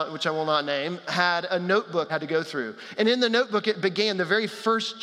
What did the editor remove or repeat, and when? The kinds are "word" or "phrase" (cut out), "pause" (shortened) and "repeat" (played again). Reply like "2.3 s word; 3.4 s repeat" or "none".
2.1 s phrase